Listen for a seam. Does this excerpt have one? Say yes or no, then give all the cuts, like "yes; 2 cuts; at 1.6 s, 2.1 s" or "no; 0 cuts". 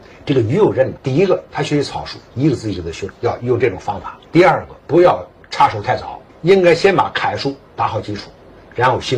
yes; 5 cuts; at 1.0 s, 3.1 s, 4.2 s, 4.8 s, 6.3 s